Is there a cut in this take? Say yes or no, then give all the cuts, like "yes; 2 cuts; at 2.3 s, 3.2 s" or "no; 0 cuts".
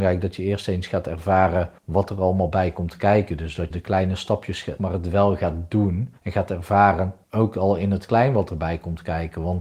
yes; 5 cuts; at 1.8 s, 3.7 s, 4.8 s, 6.2 s, 7.2 s